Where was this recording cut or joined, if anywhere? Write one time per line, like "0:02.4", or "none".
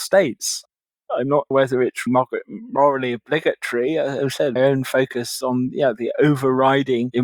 0:01.5
0:02.1
0:04.6
0:05.4